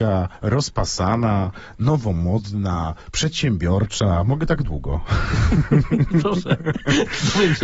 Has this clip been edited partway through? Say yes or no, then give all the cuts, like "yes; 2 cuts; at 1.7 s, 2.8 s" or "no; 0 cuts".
no; 0 cuts